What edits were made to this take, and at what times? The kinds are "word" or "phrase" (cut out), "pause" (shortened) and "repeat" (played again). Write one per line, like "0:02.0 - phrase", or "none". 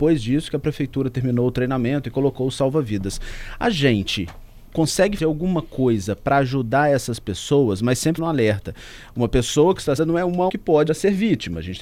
0:05.2 - word
0:08.2 - word
0:10.0 - phrase
0:10.5 - word
0:10.9 - word